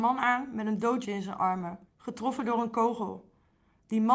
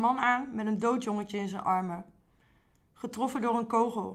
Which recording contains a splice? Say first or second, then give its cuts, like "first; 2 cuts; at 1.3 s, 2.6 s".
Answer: first; 2 cuts; at 1.0 s, 1.9 s